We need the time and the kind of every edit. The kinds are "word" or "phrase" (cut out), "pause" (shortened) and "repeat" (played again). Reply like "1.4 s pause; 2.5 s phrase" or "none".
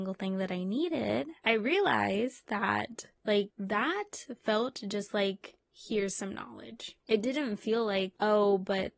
none